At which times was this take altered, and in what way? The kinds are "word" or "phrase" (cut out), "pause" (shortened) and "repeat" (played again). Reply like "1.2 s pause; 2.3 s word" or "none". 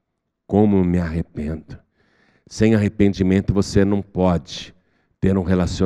none